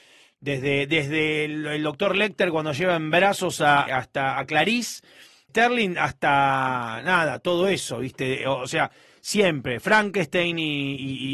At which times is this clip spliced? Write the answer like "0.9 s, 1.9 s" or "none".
3.9 s, 5.5 s